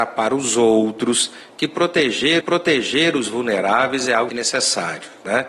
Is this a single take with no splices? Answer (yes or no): no